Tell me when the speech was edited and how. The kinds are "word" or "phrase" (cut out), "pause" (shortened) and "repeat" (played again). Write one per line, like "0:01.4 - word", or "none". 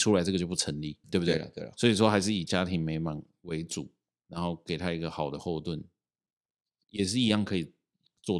0:01.0 - word

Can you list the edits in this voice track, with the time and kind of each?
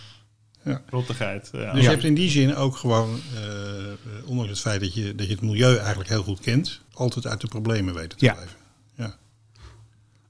0:06.9 - pause

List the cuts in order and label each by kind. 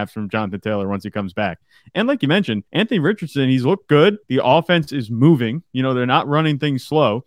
0:02.7 - pause
0:04.2 - pause

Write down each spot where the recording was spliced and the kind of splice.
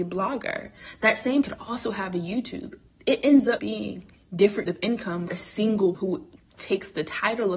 0:01.4 - word
0:03.6 - word
0:04.7 - word
0:05.3 - word
0:05.9 - word

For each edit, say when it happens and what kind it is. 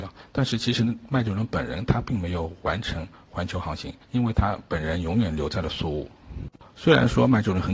0:04.0 - pause
0:06.7 - pause

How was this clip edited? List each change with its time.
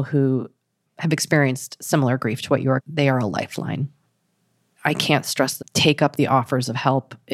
0:02.8 - word
0:05.6 - phrase

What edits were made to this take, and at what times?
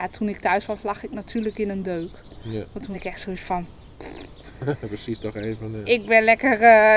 0:02.9 - word

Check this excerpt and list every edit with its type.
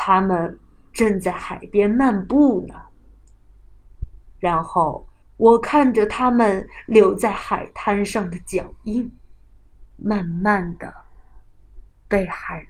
0:05.2 - pause

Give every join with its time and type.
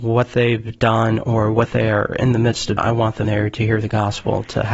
0:02.8 - word
0:03.2 - word

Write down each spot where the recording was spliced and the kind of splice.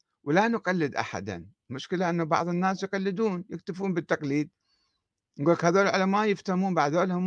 none

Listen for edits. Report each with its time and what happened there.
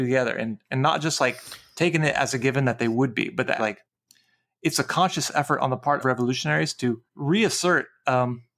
0:03.6 - word
0:06.0 - word
0:07.1 - pause

